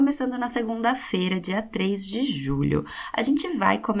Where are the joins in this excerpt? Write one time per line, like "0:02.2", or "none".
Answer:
none